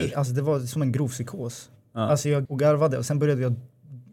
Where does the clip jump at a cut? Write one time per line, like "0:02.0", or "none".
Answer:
0:02.5